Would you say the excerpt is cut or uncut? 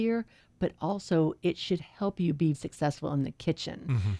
cut